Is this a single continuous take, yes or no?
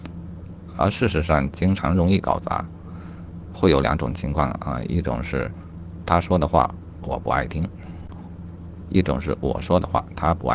no